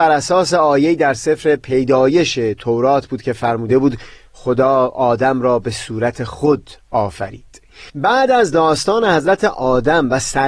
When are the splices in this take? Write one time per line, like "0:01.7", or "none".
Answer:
0:07.9